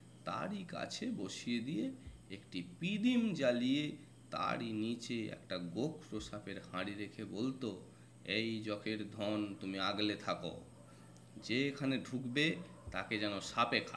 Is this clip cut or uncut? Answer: uncut